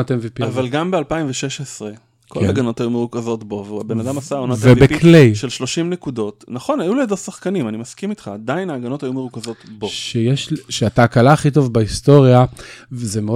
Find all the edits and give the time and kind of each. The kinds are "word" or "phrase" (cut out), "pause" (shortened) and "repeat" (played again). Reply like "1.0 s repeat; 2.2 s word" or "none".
none